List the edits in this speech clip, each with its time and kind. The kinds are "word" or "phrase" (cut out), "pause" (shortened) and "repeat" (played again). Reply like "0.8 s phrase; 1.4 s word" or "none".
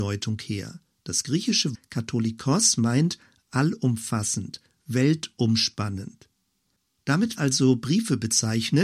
1.7 s word; 7.4 s word